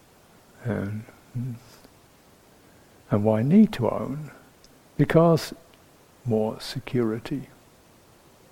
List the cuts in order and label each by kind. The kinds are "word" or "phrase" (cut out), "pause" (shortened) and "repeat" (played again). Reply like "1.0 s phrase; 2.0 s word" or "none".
6.1 s word

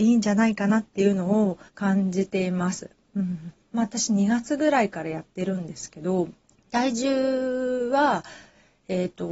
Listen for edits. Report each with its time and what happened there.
1.7 s pause; 6.4 s pause

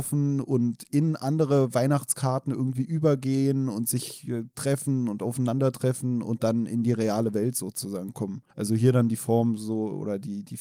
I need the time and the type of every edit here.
8.5 s pause

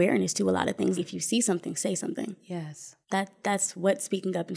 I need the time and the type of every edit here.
1.0 s word; 3.0 s pause

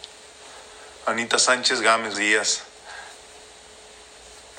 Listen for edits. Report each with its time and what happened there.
2.1 s word

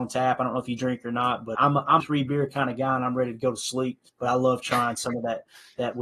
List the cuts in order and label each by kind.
1.6 s word; 2.0 s phrase; 4.1 s pause

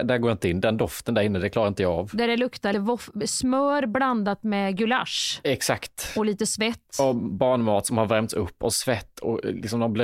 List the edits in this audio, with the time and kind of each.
2.7 s word

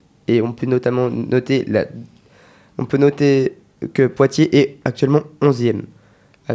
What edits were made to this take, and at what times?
none

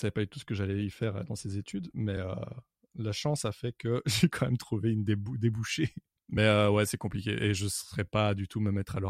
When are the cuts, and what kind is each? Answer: none

